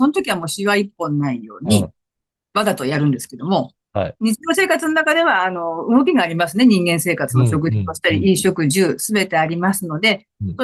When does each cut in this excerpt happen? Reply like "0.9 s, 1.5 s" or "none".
none